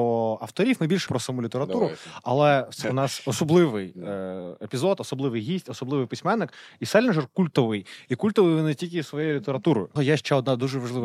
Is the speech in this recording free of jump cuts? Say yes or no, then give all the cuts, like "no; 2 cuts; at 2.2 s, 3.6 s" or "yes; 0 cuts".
no; 3 cuts; at 1.1 s, 2.8 s, 10.0 s